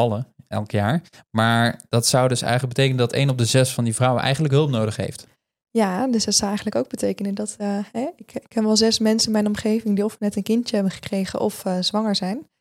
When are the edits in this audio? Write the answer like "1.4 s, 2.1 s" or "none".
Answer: none